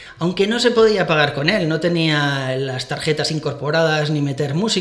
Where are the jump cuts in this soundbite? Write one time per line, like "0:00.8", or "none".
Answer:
none